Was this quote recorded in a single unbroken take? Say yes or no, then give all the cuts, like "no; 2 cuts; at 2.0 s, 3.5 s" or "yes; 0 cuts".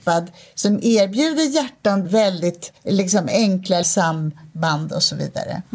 no; 3 cuts; at 2.0 s, 2.8 s, 3.8 s